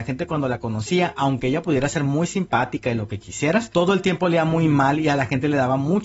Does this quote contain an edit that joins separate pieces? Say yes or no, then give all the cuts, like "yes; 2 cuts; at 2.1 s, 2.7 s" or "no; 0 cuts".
no; 0 cuts